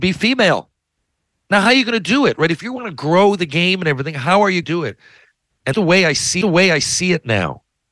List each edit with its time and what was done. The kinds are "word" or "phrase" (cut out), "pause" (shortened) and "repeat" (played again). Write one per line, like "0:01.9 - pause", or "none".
0:01.3 - pause
0:04.6 - word
0:05.7 - word
0:06.4 - repeat